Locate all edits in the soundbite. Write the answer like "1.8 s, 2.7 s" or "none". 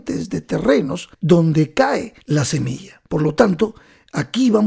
1.1 s, 2.2 s, 3.1 s